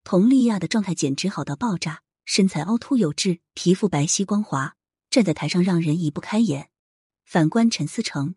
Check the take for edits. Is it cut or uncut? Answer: uncut